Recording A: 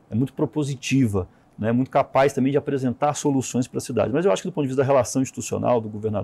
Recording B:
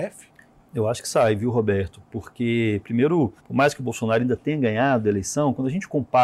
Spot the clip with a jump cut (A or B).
B